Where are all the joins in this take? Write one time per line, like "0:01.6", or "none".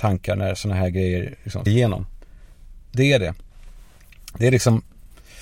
0:01.7